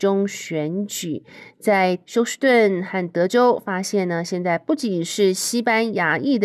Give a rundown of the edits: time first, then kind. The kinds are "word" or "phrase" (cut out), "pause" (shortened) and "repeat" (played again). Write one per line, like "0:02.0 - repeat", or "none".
0:02.0 - pause